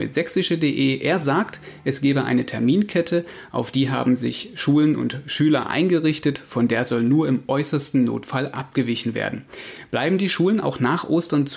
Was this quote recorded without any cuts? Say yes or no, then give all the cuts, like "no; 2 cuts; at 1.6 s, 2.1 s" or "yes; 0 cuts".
yes; 0 cuts